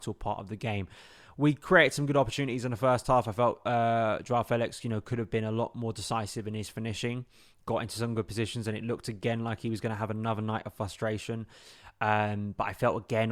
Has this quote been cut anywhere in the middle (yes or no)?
no